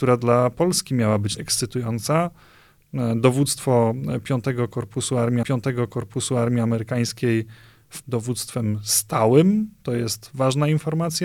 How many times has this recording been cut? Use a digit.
3